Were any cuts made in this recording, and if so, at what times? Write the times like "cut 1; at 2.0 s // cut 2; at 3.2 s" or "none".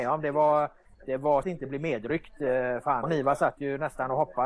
cut 1; at 1.4 s // cut 2; at 3.0 s

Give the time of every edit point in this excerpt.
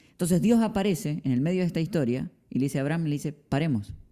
none

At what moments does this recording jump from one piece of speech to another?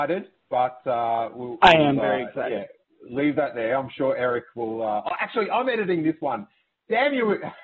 none

